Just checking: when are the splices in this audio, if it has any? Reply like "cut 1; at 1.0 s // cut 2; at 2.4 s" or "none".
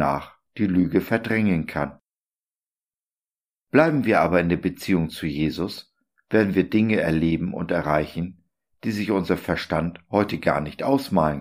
none